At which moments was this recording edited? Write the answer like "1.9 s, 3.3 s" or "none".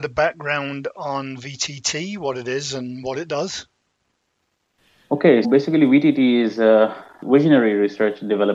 5.4 s